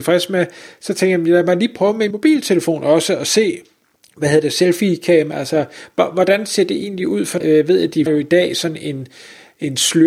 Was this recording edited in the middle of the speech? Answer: yes; 4 cuts; at 2.1 s, 3.8 s, 7.4 s, 8.1 s

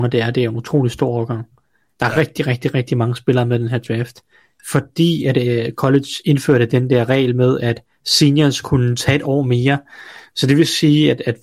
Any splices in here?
no; 0 cuts

